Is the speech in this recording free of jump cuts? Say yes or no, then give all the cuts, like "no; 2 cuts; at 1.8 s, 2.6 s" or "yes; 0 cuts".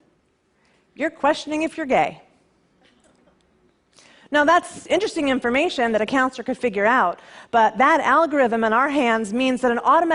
yes; 0 cuts